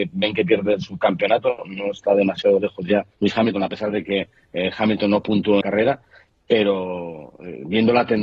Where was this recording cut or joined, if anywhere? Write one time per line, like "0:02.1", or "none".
0:03.1
0:05.6